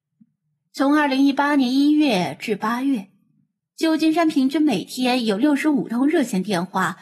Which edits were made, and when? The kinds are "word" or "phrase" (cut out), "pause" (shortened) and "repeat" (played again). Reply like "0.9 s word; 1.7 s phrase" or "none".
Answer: none